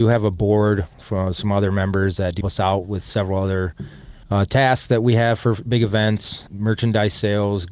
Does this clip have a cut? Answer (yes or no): yes